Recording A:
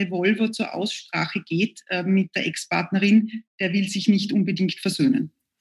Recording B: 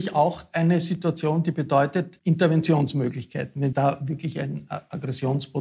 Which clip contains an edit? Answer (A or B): B